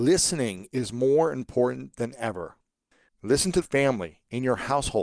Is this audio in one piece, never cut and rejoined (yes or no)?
no